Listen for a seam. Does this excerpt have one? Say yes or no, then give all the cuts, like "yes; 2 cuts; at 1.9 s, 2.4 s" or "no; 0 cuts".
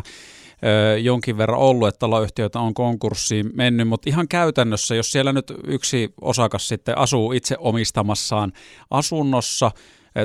no; 0 cuts